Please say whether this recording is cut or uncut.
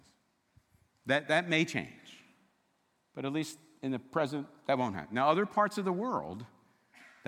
uncut